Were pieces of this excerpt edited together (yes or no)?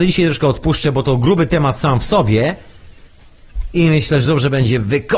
no